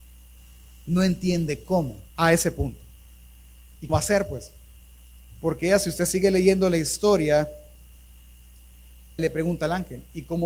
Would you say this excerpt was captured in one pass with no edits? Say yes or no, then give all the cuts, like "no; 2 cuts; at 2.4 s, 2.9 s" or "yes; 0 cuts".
no; 3 cuts; at 2.1 s, 3.9 s, 9.2 s